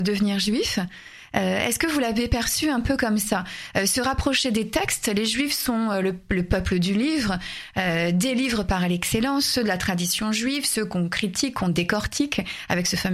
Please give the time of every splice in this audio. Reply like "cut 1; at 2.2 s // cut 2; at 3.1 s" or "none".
none